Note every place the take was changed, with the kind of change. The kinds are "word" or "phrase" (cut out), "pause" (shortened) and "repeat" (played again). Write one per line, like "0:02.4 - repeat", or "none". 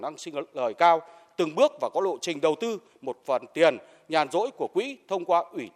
none

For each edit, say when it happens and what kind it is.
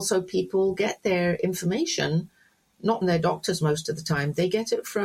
0:03.0 - word

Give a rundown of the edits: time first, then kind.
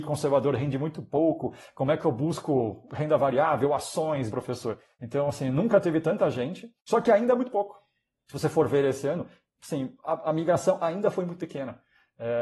0:04.3 - word

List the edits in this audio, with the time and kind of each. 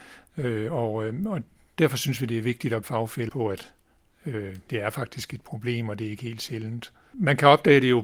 0:02.8 - word
0:03.3 - word
0:04.7 - word

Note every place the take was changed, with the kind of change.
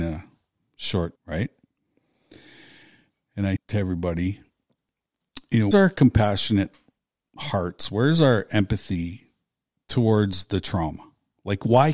0:01.2 - word
0:03.6 - word
0:05.7 - word

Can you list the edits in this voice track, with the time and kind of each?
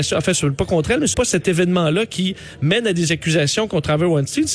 0:01.1 - word

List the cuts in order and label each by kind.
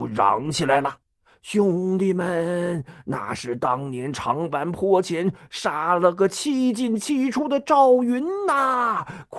0:01.0 - pause

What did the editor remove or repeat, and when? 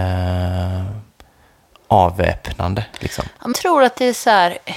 0:03.5 - word

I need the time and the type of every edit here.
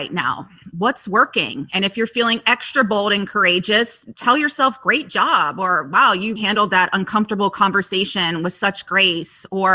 0:06.4 - word

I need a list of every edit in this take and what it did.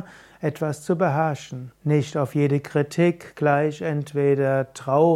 0:01.8 - pause

